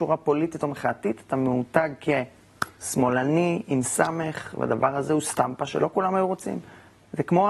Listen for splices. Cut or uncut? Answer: uncut